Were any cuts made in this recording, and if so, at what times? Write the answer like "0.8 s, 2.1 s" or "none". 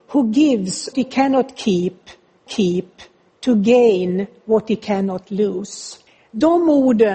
0.9 s, 2.5 s, 6.1 s